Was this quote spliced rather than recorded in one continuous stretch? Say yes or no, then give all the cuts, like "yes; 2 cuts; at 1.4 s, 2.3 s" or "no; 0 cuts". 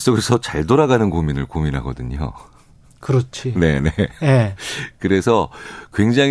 no; 0 cuts